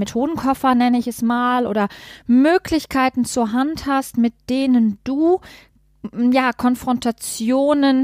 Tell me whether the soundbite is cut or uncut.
uncut